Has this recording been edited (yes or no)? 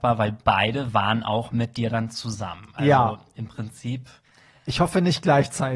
no